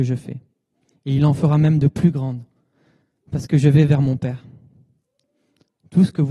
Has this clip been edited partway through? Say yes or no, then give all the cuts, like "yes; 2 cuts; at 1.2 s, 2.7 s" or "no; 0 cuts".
no; 0 cuts